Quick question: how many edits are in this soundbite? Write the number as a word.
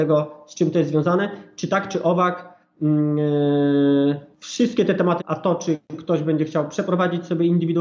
three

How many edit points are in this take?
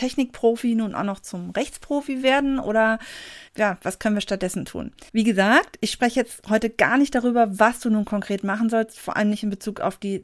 two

